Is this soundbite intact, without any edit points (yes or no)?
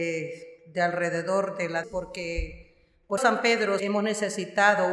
no